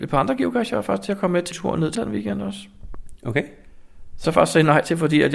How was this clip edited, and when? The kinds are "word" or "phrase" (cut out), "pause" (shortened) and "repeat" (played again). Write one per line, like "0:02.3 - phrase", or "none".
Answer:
0:01.5 - word
0:01.9 - word
0:04.2 - word